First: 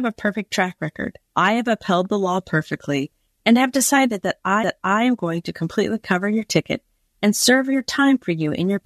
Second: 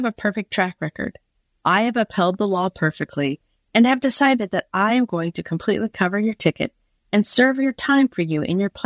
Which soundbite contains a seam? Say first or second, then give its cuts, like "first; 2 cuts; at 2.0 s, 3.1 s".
first; 2 cuts; at 1.3 s, 4.6 s